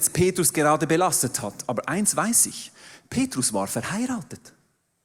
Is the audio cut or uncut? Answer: uncut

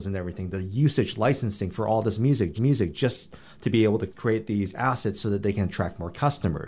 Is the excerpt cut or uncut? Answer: cut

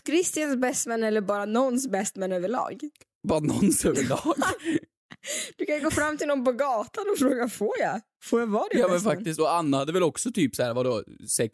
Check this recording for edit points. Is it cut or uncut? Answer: uncut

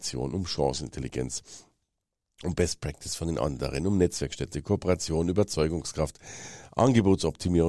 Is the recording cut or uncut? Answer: uncut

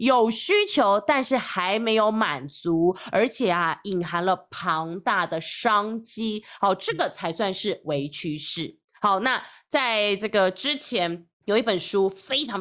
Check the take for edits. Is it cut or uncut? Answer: cut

